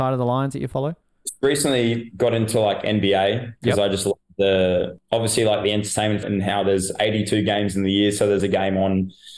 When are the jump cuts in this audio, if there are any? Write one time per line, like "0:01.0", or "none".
0:05.0
0:06.2
0:08.4